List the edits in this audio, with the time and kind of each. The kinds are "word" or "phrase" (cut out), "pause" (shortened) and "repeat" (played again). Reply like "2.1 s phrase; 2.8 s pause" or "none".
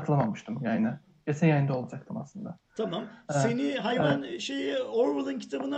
none

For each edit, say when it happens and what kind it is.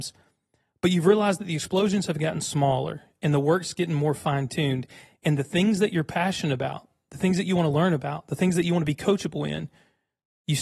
none

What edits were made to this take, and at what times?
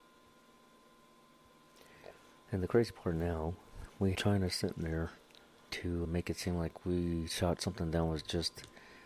4.1 s word; 5.7 s word; 6.0 s word; 7.6 s word

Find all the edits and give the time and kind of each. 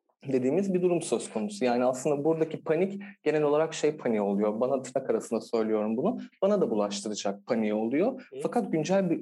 none

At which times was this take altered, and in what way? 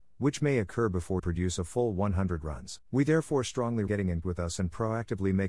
1.2 s word; 2.8 s pause; 3.9 s word; 4.2 s word

